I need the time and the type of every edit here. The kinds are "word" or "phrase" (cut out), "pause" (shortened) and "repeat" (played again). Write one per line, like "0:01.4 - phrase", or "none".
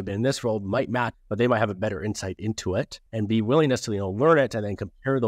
0:01.1 - phrase
0:03.1 - pause